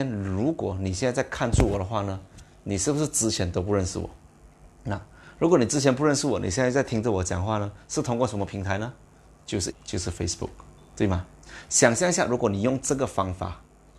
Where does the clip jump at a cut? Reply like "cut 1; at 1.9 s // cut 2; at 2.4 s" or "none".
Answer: cut 1; at 4.7 s // cut 2; at 9.7 s // cut 3; at 10.8 s